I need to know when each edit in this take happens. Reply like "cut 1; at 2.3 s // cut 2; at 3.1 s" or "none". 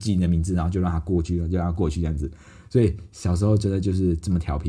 none